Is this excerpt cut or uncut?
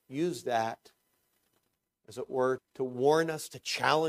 cut